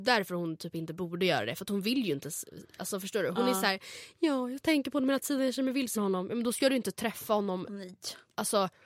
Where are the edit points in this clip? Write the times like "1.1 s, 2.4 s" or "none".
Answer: 5.9 s